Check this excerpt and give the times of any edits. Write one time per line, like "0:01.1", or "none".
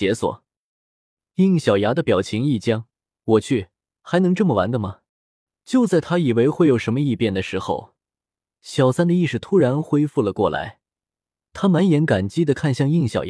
0:02.9
0:05.1

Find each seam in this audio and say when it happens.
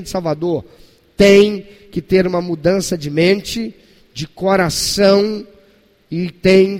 none

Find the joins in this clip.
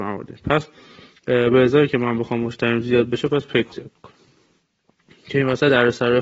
0:03.7

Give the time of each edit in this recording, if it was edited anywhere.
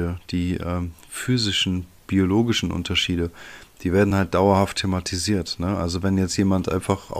none

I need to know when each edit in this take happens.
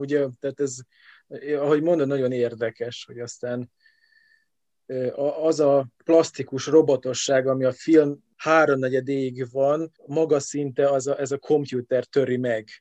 0:05.9
0:10.0

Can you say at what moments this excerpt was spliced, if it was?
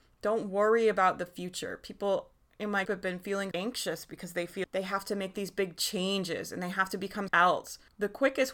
0:02.8
0:03.5
0:04.6
0:07.3

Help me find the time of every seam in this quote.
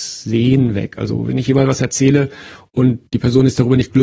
none

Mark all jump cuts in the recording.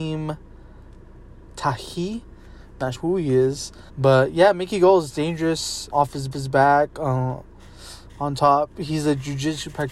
0:02.9
0:03.9
0:05.9
0:06.3

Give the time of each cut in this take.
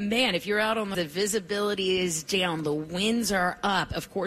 0:00.9

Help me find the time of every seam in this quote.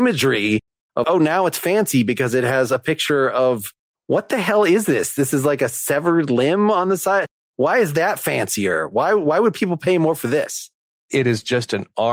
0:01.0

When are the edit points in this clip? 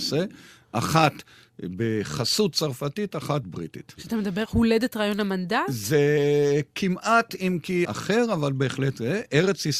0:03.4
0:04.5
0:07.8

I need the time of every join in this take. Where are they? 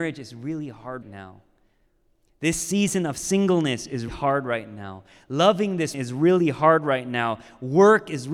0:01.0
0:04.1
0:05.9

